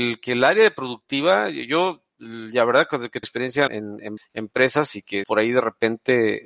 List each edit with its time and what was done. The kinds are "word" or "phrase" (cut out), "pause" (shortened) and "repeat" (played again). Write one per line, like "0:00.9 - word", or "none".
0:03.2 - phrase
0:03.7 - word
0:04.2 - word
0:05.2 - word